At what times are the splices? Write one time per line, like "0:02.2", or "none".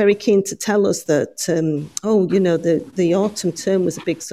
none